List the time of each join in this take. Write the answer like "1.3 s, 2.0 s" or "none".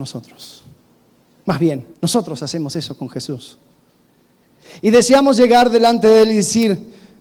1.9 s